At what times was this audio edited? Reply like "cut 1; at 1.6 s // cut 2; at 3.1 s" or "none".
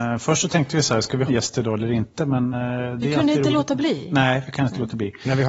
cut 1; at 1.3 s // cut 2; at 2.5 s

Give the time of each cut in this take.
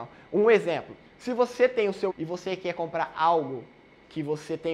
cut 1; at 1.1 s // cut 2; at 2.1 s

